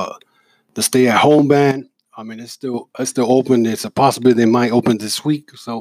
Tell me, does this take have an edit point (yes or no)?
no